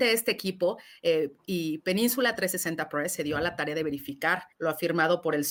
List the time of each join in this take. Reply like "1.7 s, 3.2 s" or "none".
4.5 s